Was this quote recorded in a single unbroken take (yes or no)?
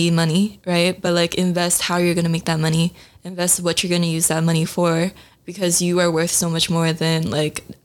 yes